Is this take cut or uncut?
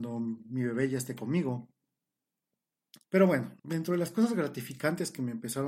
cut